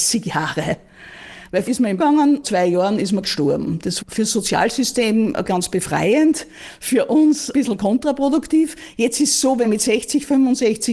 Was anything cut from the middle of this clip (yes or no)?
yes